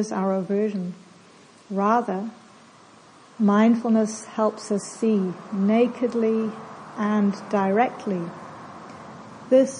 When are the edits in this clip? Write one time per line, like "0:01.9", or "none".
none